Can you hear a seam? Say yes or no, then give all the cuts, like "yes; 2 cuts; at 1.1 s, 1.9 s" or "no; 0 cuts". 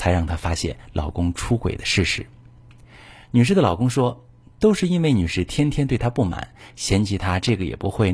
no; 0 cuts